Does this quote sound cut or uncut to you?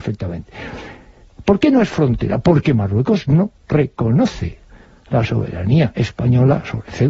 uncut